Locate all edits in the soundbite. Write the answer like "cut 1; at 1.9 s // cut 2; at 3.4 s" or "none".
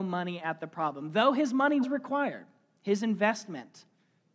cut 1; at 1.8 s